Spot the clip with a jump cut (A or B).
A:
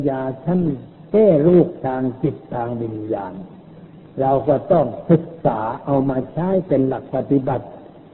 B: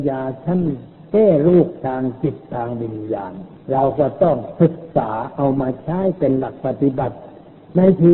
B